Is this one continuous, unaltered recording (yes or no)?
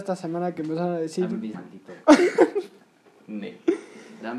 no